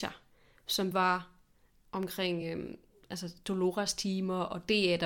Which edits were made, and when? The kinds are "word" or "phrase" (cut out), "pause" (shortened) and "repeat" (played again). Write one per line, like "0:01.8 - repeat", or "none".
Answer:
none